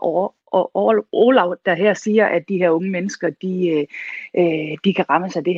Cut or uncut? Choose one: uncut